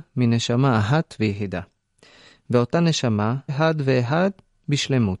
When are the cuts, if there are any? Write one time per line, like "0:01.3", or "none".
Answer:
0:03.5